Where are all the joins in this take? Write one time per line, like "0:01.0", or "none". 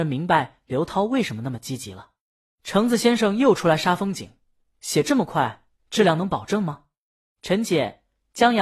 none